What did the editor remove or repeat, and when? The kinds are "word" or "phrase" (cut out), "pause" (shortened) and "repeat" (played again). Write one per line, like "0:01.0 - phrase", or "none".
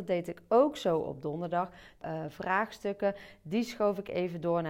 0:02.0 - word